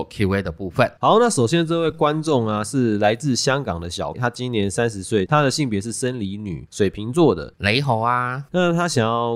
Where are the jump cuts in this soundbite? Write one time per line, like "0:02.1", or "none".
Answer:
0:04.1